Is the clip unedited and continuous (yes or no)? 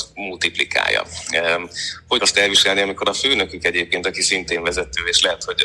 no